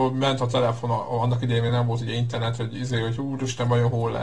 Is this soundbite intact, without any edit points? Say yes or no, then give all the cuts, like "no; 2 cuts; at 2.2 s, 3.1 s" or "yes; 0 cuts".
yes; 0 cuts